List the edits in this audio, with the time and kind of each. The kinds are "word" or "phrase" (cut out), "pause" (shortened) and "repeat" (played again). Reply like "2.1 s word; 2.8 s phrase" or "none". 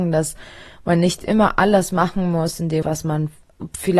2.8 s word